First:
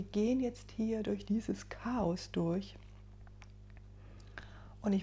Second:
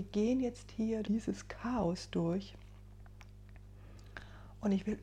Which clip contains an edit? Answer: second; 1 cut; at 1.0 s

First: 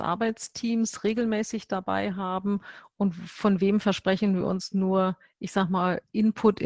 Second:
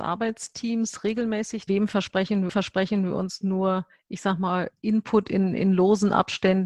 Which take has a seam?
second; 2 cuts; at 1.7 s, 2.5 s

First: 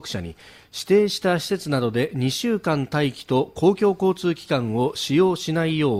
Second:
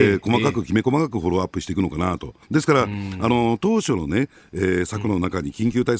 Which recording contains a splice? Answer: second; 1 cut; at 2.4 s

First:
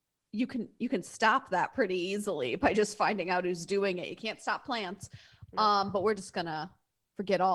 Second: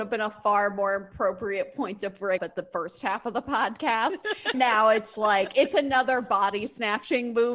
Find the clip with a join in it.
second; 3 cuts; at 2.4 s, 4.5 s, 5.1 s

